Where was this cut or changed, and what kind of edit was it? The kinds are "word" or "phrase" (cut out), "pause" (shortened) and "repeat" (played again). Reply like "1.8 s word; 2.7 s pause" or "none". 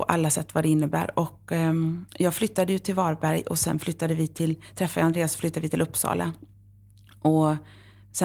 2.1 s pause